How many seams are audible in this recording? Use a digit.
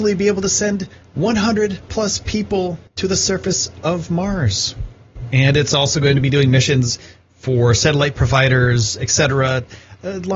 1